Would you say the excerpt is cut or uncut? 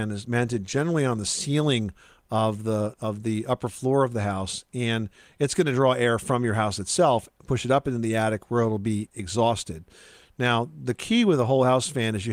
uncut